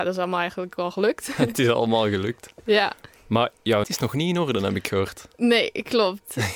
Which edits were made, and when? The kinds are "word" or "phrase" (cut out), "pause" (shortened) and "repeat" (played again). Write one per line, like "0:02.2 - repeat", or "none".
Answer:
0:03.8 - word

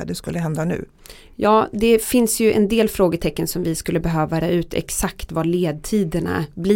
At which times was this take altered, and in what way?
0:04.4 - word

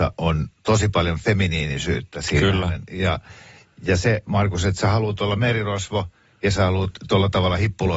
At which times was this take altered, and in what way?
none

